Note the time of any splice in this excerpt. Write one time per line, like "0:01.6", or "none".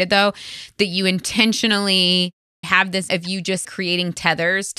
0:02.6
0:03.1
0:03.6